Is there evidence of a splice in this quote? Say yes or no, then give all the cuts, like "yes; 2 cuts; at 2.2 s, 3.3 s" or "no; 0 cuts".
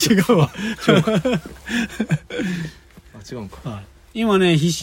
no; 0 cuts